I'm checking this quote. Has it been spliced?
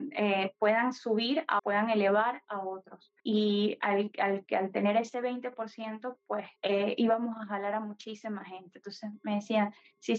yes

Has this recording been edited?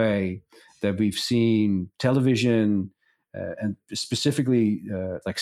no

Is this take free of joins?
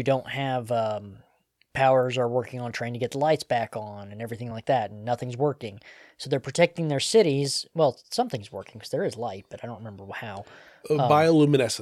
yes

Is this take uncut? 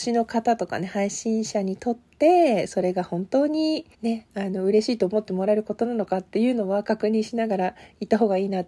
no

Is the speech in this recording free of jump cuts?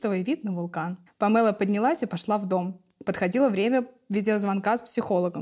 no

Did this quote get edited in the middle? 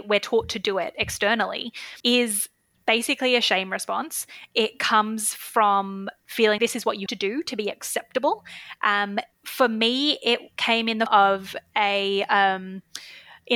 yes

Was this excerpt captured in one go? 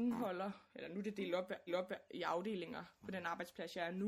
no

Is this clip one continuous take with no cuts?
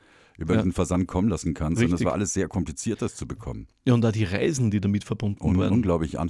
yes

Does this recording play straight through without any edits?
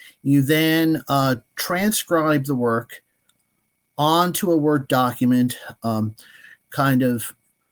yes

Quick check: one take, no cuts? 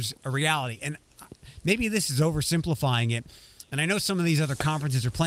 yes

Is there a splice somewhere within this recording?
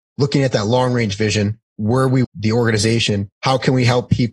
yes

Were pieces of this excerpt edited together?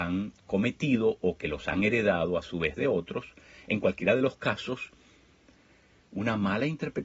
no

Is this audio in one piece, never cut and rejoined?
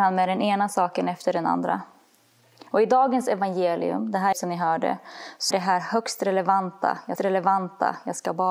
no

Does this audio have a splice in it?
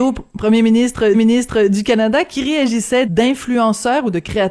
yes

